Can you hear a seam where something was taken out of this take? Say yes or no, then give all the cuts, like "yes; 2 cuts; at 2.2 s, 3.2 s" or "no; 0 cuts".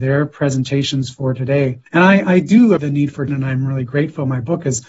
yes; 3 cuts; at 1.9 s, 2.8 s, 3.3 s